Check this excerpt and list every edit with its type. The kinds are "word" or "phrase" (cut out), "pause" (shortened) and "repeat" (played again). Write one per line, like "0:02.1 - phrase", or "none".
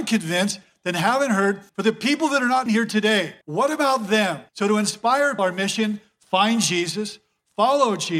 0:01.7 - pause
0:02.7 - word
0:03.4 - pause
0:04.5 - pause
0:05.4 - word